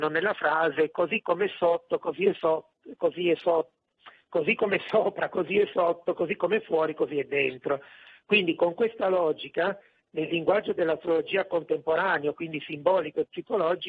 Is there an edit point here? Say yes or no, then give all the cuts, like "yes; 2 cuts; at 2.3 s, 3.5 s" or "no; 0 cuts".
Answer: no; 0 cuts